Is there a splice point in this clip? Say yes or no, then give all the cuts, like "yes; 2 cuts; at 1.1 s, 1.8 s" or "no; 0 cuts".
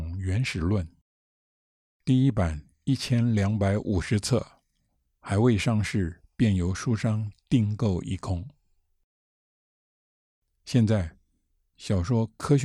no; 0 cuts